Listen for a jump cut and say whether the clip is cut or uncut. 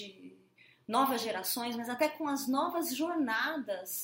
uncut